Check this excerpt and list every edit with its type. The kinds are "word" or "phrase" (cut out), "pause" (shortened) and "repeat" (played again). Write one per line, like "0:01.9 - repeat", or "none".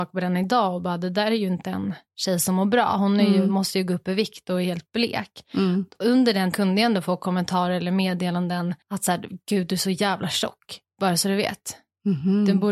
0:06.5 - word
0:08.8 - pause